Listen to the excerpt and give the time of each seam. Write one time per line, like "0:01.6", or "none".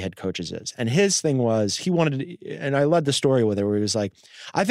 none